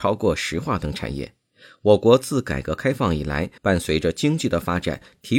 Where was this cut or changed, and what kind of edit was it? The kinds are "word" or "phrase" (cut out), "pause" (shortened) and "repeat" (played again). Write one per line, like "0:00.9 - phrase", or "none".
0:03.6 - pause